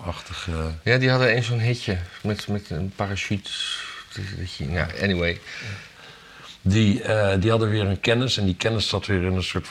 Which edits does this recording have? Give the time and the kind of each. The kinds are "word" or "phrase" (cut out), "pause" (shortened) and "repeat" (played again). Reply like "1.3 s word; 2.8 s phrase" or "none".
none